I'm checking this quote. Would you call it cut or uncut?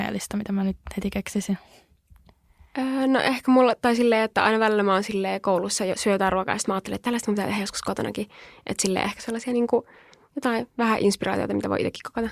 uncut